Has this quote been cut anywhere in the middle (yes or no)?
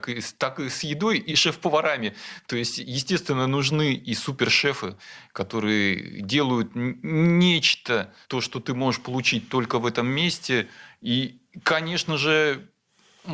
yes